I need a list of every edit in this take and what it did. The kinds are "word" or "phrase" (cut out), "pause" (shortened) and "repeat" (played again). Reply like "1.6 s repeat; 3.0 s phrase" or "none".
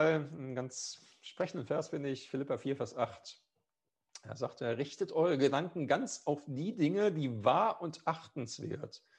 none

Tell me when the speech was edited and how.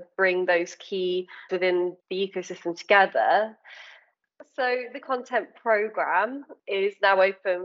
1.5 s word; 2.0 s pause; 5.0 s word

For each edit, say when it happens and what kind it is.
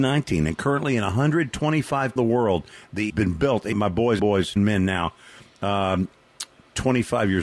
2.2 s phrase; 3.1 s phrase; 3.7 s word; 4.2 s phrase; 4.6 s word

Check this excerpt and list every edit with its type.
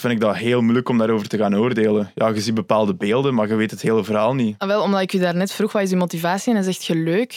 none

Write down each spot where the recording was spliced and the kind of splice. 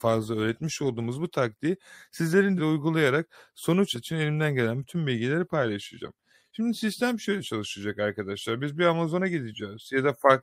2.6 s phrase; 3.9 s word

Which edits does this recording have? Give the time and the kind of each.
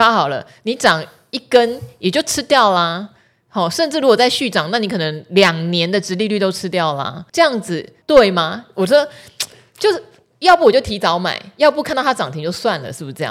7.3 s pause; 8.0 s pause

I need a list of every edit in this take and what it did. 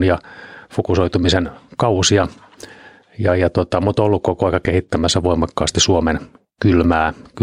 none

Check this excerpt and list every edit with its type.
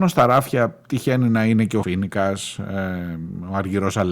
1.8 s word

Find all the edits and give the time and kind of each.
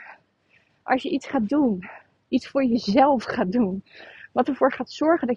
none

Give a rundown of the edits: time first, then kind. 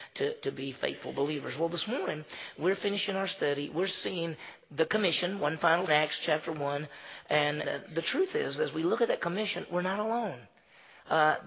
5.9 s phrase; 7.6 s word

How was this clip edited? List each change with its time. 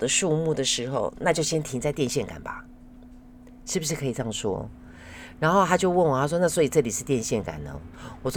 none

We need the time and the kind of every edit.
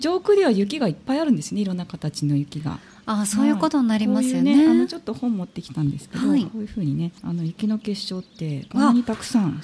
7.2 s pause

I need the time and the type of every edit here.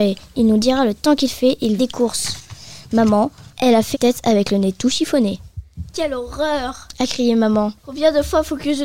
1.8 s phrase; 3.9 s word; 7.8 s pause

